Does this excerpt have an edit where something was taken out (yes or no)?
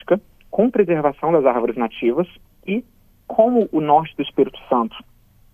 yes